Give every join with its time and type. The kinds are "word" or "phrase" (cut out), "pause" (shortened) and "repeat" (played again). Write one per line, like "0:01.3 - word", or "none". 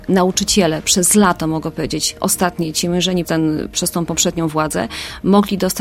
0:03.2 - word